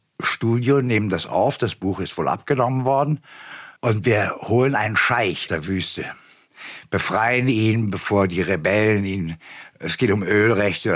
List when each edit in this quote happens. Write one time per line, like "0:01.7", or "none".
0:03.8
0:05.5